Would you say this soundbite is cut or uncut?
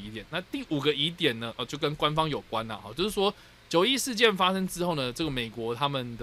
uncut